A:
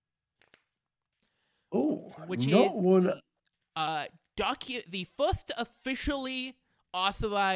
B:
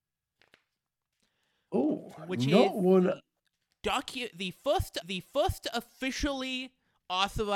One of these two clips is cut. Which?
B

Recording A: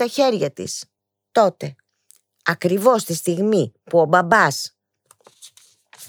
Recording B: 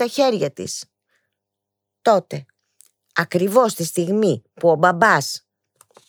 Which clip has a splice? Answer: A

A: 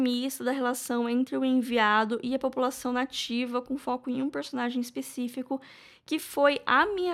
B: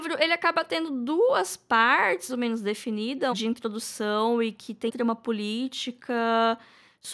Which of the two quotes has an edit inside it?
B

